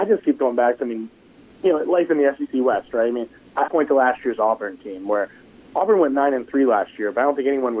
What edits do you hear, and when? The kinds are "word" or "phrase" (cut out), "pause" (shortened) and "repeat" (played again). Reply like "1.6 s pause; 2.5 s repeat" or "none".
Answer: 3.7 s word